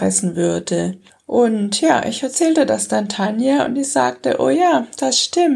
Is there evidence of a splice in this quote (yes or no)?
no